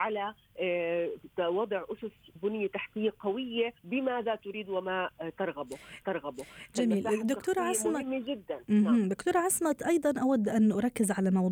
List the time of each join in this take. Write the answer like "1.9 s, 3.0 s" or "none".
2.4 s, 3.8 s, 6.0 s